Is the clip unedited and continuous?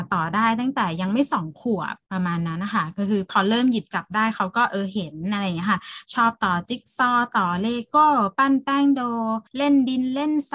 no; 2 cuts; at 2.0 s, 9.5 s

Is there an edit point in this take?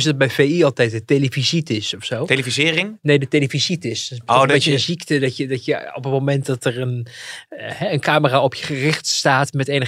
no; 0 cuts

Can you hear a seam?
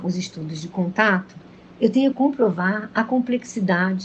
yes; 2 cuts; at 1.5 s, 2.1 s

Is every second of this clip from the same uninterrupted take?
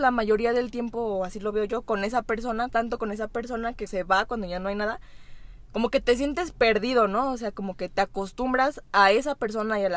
no; 2 cuts; at 2.7 s, 3.9 s

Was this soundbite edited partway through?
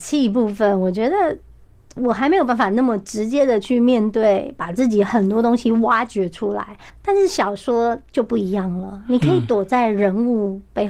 no; 0 cuts

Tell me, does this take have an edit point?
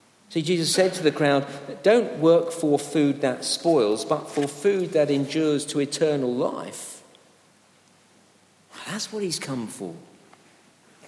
no; 0 cuts

